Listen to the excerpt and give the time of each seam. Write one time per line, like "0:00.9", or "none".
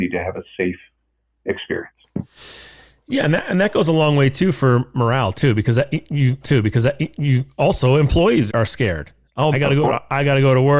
0:06.4
0:08.5
0:09.5